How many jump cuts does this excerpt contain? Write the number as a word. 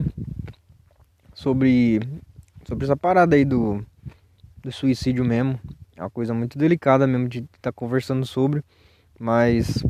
zero